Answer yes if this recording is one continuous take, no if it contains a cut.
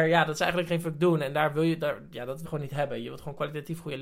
no